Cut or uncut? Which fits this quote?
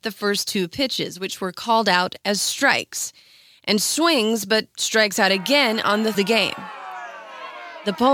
cut